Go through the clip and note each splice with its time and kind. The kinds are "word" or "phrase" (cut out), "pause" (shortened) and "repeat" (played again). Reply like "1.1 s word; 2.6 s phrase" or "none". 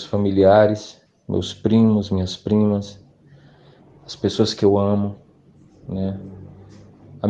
none